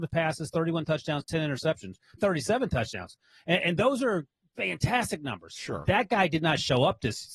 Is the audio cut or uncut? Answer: cut